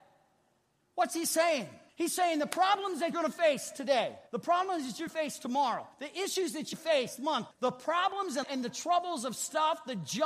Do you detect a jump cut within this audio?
yes; 9 cuts; at 1.9 s, 3.1 s, 4.3 s, 5.1 s, 5.9 s, 6.7 s, 7.2 s, 7.5 s, 8.4 s

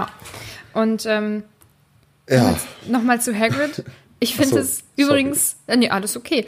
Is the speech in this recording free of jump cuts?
yes; 0 cuts

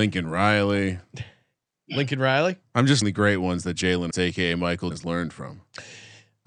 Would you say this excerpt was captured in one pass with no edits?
no; 3 cuts; at 3.0 s, 4.1 s, 4.9 s

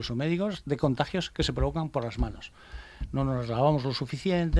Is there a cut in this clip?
no; 0 cuts

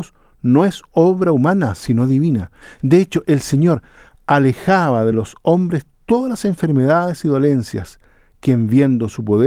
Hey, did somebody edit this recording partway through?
no; 0 cuts

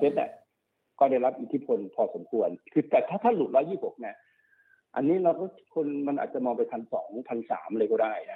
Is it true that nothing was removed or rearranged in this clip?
yes; 0 cuts

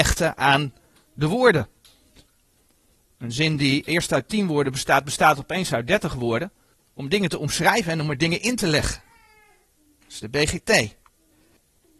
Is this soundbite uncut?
yes; 0 cuts

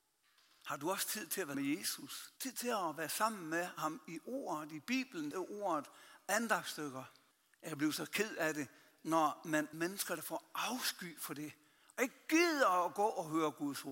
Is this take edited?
yes; 5 cuts; at 1.5 s, 2.4 s, 5.3 s, 7.3 s, 9.7 s

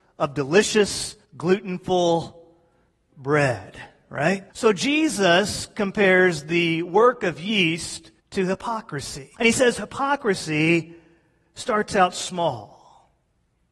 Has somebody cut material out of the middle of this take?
yes; 4 cuts; at 1.2 s, 4.5 s, 8.2 s, 9.3 s

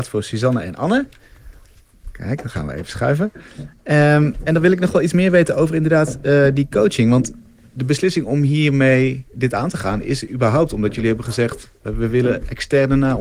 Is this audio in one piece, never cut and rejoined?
yes; 0 cuts

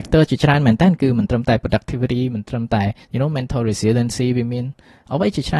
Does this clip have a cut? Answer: yes; 1 cut; at 3.0 s

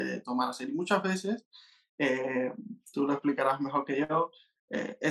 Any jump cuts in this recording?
no; 0 cuts

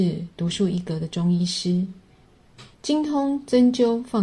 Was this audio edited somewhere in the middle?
yes; 1 cut; at 2.7 s

